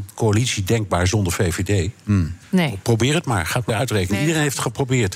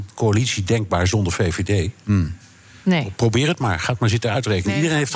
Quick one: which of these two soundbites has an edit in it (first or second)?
first